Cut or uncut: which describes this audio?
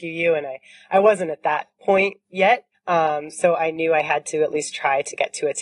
uncut